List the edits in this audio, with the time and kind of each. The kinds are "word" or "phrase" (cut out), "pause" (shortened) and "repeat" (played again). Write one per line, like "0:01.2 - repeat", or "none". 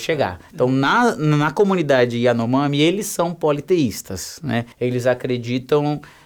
0:04.7 - pause